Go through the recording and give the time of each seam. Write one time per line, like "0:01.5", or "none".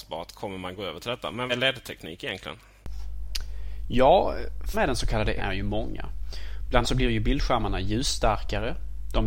0:01.5
0:04.7
0:05.4
0:06.8